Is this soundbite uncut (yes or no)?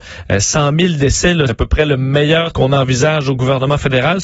no